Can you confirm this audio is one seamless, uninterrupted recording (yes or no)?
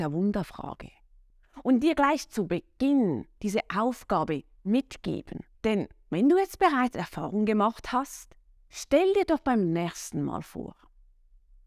no